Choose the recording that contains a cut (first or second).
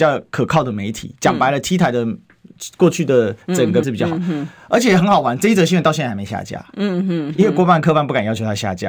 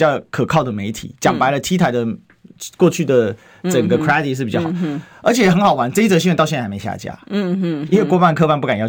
first